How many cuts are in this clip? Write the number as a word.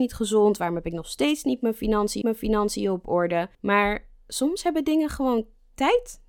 two